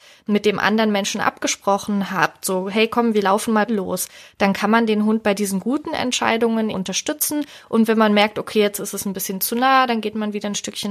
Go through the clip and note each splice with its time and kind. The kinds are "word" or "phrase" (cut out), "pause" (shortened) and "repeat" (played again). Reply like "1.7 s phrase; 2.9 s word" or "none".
3.7 s word; 6.7 s word